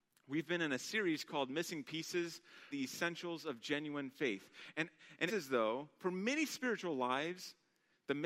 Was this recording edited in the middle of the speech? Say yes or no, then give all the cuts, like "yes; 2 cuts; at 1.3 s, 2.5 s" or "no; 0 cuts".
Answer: yes; 2 cuts; at 2.7 s, 5.3 s